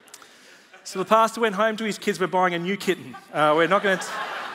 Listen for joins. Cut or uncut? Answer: cut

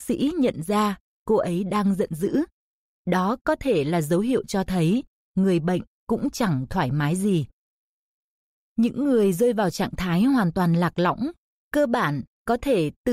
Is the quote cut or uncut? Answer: uncut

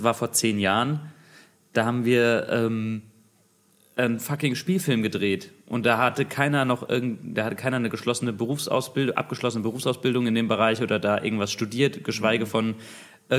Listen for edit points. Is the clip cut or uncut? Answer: uncut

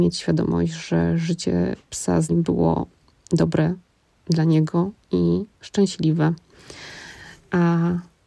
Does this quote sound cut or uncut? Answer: cut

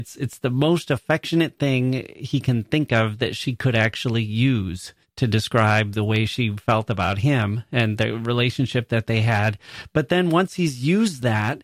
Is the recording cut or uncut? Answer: cut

